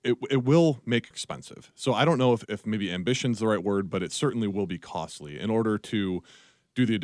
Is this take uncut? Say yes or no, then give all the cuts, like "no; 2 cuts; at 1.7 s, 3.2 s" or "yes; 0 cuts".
no; 2 cuts; at 1.1 s, 2.5 s